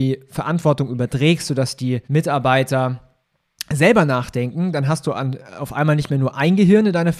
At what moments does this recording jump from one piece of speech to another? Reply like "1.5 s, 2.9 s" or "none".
2.0 s